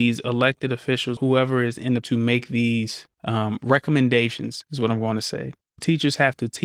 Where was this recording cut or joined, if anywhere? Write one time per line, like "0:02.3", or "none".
0:01.2
0:02.0
0:03.1